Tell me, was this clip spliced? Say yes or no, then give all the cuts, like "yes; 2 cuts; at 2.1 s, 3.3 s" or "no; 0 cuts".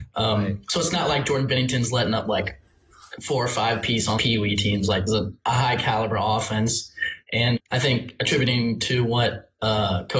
yes; 3 cuts; at 4.2 s, 5.1 s, 7.6 s